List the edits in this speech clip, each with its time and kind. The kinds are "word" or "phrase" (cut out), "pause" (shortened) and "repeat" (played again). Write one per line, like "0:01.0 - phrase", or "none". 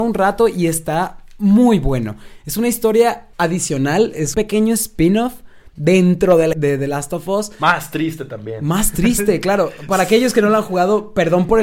0:03.3 - pause
0:04.3 - word
0:06.5 - phrase